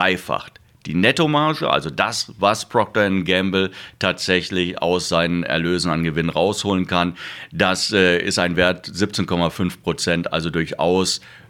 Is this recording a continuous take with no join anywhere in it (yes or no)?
yes